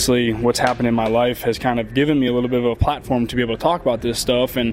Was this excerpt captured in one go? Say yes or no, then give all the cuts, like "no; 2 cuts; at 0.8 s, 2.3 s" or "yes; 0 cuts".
yes; 0 cuts